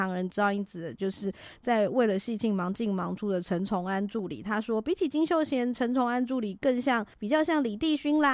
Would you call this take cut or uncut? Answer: cut